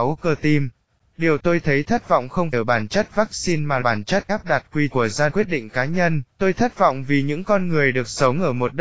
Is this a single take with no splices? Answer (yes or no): no